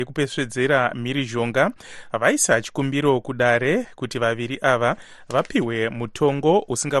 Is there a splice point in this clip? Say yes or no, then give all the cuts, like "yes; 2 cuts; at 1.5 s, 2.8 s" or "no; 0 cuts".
no; 0 cuts